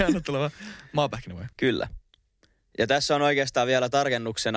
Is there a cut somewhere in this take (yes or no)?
yes